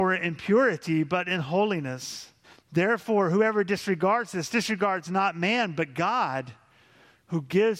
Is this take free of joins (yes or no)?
no